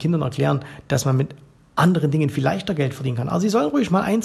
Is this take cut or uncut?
uncut